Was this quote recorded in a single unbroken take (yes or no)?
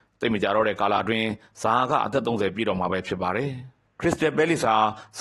no